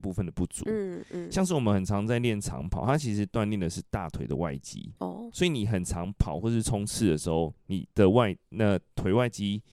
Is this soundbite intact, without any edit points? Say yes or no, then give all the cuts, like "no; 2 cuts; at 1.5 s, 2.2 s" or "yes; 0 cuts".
no; 1 cut; at 5.0 s